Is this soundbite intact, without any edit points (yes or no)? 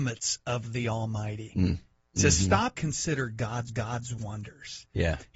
no